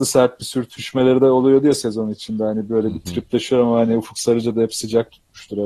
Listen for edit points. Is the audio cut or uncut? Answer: uncut